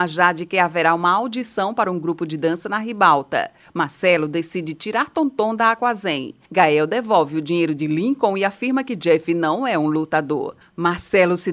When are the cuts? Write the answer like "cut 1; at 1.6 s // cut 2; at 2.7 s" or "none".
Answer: none